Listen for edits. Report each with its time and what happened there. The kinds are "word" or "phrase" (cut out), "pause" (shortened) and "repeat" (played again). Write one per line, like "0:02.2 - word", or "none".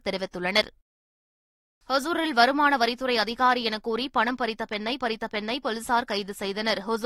0:05.0 - repeat